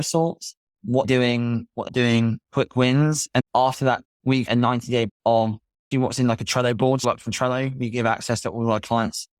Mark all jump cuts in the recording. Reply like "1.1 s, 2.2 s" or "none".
1.0 s, 1.9 s, 3.4 s, 4.0 s, 4.5 s, 5.1 s, 5.9 s, 7.0 s